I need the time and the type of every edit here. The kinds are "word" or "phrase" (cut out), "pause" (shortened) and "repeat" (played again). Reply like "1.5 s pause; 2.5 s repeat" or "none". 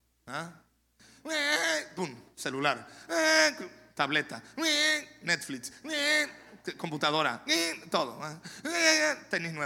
none

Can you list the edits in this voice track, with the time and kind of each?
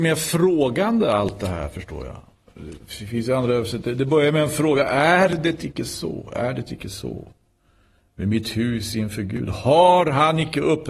none

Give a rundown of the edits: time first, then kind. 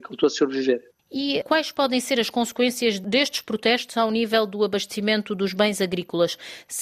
none

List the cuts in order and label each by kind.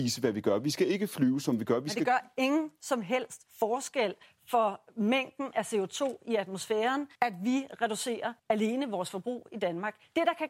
3.5 s pause; 7.1 s pause; 8.4 s pause

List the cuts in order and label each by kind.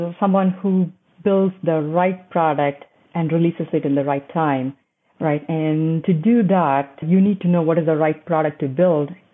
none

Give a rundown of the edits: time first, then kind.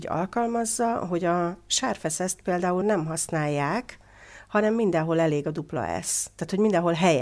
2.8 s word

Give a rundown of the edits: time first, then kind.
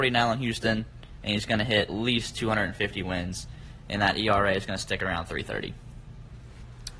1.9 s word

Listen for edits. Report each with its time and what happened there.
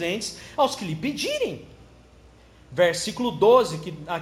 none

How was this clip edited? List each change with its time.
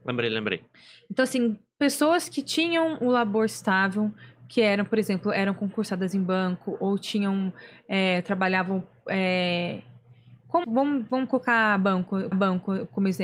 10.6 s word; 12.3 s repeat

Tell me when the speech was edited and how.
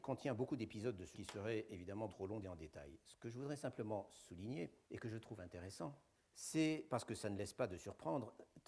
1.1 s word; 2.1 s word; 2.4 s word; 4.8 s pause; 6.1 s pause

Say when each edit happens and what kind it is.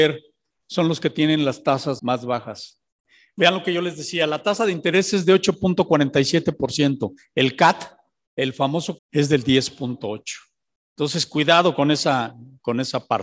2.0 s word; 9.0 s word

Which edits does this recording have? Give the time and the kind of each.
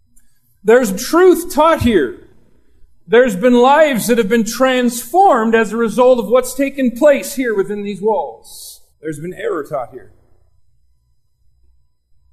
1.0 s word; 8.9 s pause

